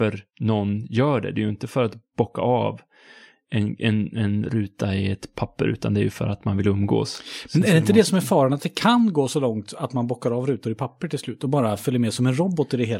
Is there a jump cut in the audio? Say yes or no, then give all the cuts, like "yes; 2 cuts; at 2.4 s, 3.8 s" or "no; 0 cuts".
no; 0 cuts